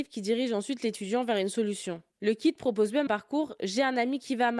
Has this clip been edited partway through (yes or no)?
yes